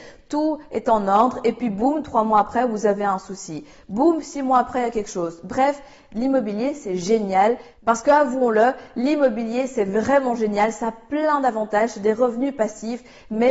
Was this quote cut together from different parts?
no; 0 cuts

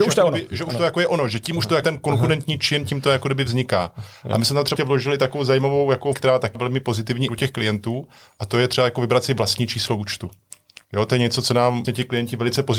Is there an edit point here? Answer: yes; 6 cuts; at 1.8 s, 4.8 s, 6.1 s, 6.5 s, 7.3 s, 11.8 s

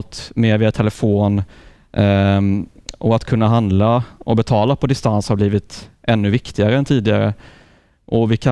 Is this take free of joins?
yes; 0 cuts

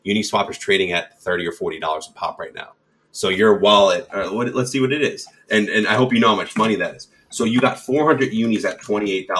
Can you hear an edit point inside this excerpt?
no; 0 cuts

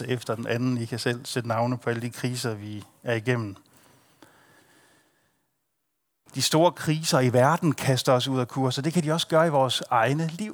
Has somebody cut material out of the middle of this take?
no; 0 cuts

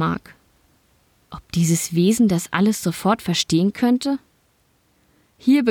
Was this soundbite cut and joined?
no; 0 cuts

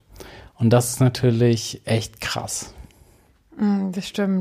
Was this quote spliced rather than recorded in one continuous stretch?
no; 0 cuts

